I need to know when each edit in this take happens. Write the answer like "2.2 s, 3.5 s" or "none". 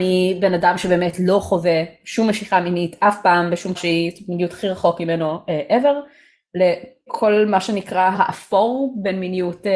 3.7 s, 7.1 s, 8.1 s